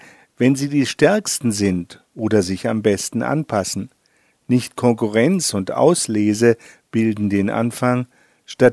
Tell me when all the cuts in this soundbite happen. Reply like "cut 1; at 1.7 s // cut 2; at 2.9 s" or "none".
none